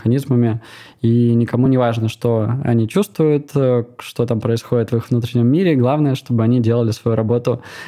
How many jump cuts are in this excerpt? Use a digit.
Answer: 0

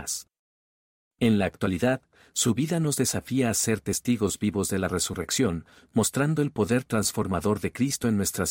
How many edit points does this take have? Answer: 0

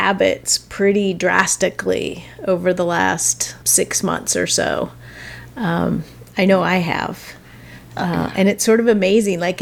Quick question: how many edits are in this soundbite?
1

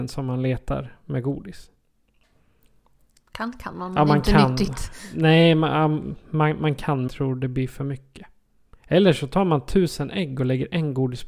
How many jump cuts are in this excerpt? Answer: 1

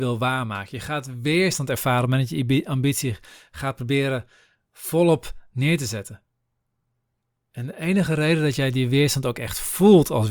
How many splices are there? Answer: 0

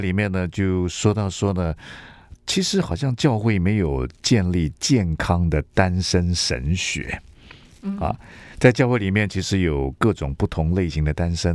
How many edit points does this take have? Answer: 1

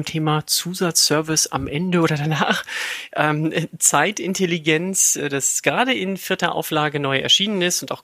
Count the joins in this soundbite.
0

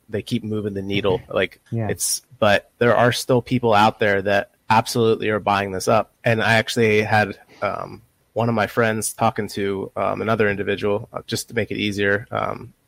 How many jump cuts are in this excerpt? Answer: 5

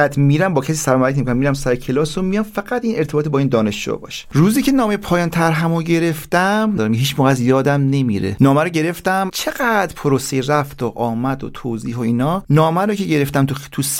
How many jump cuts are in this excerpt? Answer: 1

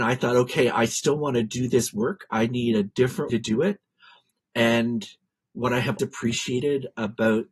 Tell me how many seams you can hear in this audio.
2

